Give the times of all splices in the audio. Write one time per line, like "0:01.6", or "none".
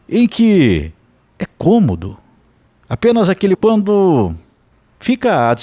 0:03.5